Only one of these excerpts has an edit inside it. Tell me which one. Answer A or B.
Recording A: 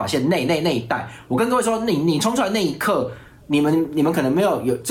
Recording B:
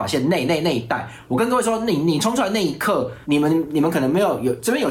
B